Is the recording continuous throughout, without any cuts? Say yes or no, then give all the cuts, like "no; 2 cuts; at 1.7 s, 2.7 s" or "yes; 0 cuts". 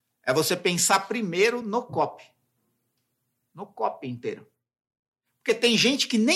yes; 0 cuts